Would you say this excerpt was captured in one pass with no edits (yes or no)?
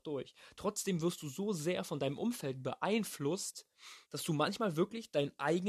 no